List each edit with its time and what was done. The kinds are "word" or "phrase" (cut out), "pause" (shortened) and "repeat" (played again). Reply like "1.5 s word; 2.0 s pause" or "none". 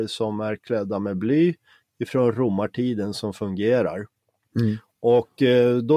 none